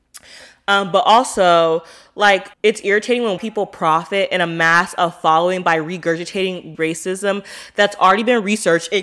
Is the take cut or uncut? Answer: cut